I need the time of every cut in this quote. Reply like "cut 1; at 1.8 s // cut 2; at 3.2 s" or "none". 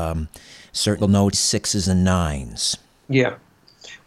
cut 1; at 1.0 s // cut 2; at 1.3 s // cut 3; at 2.9 s